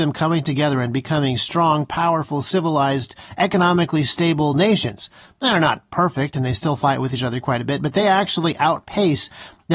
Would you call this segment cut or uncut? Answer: uncut